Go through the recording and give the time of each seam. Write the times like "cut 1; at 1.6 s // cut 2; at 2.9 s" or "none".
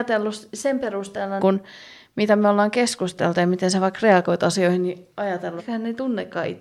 cut 1; at 1.4 s // cut 2; at 5.6 s